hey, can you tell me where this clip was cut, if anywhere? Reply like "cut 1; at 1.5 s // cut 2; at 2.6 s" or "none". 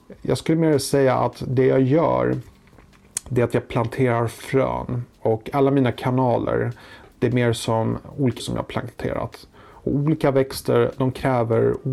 cut 1; at 5.1 s // cut 2; at 8.4 s